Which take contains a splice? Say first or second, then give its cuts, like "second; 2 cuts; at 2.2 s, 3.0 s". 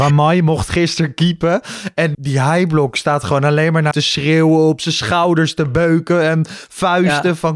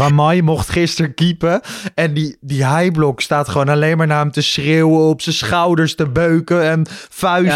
first; 2 cuts; at 2.1 s, 3.9 s